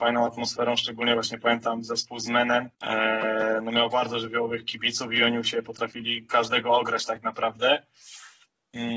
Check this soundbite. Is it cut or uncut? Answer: cut